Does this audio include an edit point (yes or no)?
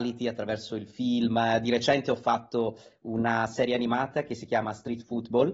no